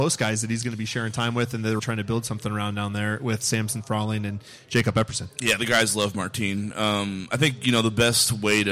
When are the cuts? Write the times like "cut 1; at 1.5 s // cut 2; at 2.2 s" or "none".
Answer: cut 1; at 1.8 s